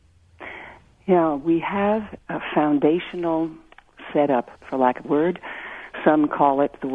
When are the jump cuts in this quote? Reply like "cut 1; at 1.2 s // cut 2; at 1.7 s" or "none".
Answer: cut 1; at 2.2 s // cut 2; at 4.6 s // cut 3; at 5.0 s